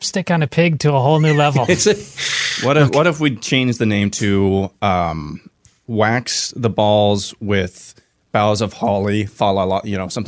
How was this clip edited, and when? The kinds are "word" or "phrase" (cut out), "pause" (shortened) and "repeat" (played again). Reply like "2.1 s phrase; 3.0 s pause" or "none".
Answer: none